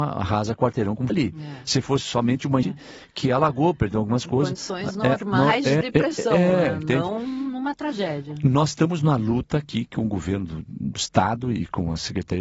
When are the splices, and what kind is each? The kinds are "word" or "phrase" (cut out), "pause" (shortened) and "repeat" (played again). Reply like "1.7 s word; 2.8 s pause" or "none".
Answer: 1.1 s word; 2.6 s word; 5.8 s word